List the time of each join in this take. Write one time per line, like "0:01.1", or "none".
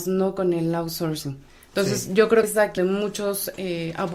0:02.4
0:02.8